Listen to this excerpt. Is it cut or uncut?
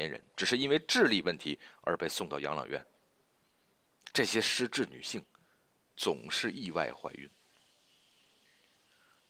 uncut